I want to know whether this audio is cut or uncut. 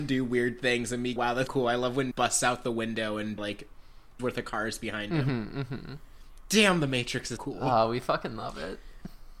cut